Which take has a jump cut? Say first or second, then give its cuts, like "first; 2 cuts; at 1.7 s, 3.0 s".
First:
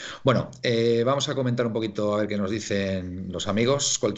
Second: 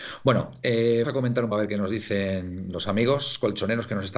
second; 2 cuts; at 1.0 s, 1.5 s